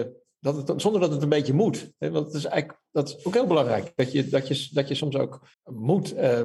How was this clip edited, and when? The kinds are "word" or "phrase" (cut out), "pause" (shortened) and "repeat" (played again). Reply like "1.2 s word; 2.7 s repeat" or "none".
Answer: 5.5 s pause